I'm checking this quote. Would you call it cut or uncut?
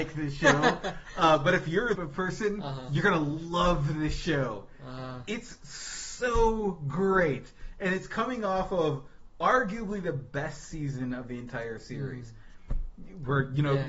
cut